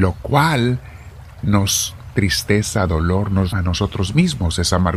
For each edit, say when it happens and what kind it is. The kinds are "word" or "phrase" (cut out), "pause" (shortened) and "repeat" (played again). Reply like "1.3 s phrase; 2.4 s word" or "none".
2.1 s word; 3.5 s word